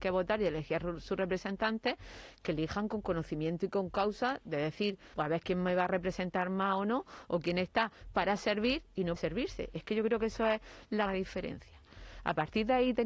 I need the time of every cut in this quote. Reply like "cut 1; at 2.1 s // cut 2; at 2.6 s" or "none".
cut 1; at 5.1 s // cut 2; at 9.2 s // cut 3; at 11.1 s